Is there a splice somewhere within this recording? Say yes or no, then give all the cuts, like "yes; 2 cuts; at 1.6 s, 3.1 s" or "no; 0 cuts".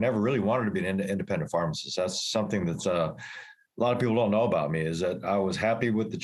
no; 0 cuts